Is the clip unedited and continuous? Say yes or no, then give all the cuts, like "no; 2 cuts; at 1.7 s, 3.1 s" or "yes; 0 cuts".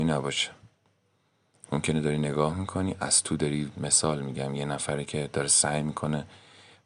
no; 1 cut; at 3.7 s